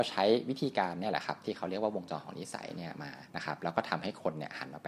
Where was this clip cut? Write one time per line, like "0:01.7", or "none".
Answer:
0:03.3